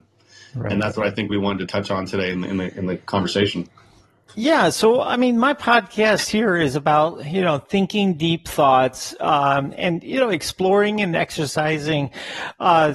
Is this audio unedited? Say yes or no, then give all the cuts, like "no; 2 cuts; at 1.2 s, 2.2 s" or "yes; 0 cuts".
yes; 0 cuts